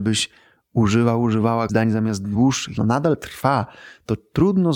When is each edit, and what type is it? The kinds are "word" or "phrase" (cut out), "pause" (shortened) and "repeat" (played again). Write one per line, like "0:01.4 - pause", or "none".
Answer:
0:01.7 - word
0:02.8 - phrase